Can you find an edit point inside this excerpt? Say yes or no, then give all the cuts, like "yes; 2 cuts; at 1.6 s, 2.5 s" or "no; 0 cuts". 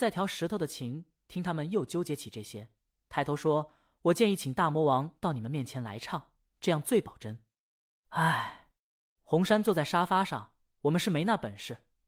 no; 0 cuts